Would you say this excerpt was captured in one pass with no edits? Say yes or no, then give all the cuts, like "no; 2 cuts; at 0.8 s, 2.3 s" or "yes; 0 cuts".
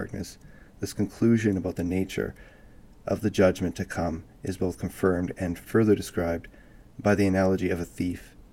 yes; 0 cuts